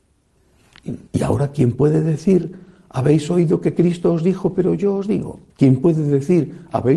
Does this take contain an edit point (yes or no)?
yes